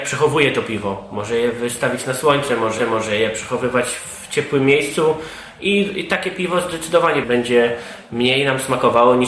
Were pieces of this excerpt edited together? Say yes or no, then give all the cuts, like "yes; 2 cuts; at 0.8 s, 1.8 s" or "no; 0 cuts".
yes; 2 cuts; at 2.8 s, 7.2 s